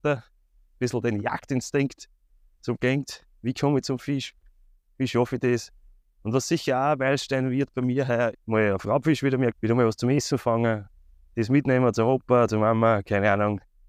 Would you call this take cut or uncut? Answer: cut